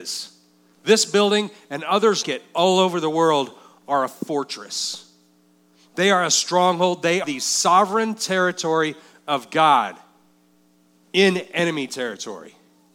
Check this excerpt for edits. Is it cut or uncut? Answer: cut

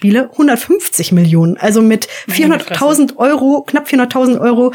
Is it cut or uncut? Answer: uncut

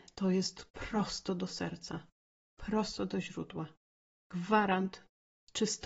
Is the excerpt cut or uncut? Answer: uncut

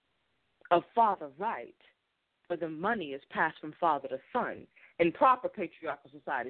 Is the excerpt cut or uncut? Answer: uncut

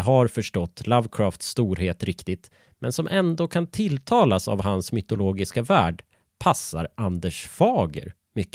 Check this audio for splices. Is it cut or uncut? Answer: uncut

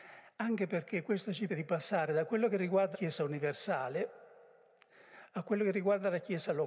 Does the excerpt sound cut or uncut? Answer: cut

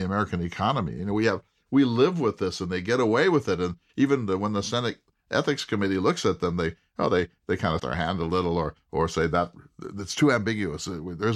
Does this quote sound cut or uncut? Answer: cut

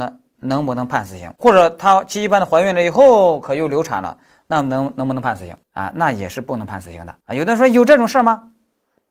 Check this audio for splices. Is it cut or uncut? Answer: cut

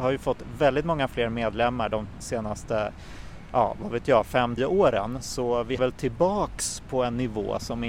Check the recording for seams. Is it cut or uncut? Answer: cut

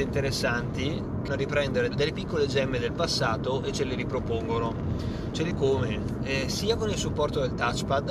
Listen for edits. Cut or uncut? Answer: cut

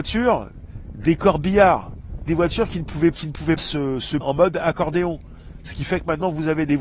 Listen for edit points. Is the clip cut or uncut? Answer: cut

